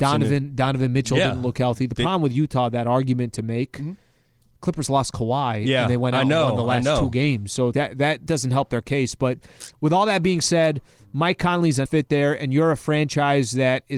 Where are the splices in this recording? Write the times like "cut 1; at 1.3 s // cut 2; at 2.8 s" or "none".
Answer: cut 1; at 7.7 s // cut 2; at 8.3 s // cut 3; at 11.9 s